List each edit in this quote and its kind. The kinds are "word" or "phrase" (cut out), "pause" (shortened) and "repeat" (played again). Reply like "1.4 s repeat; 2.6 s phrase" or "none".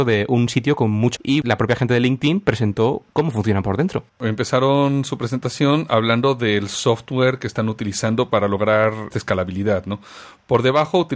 1.2 s word; 4.1 s pause